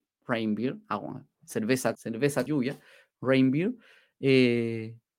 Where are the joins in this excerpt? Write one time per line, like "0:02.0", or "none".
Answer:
0:01.9
0:02.5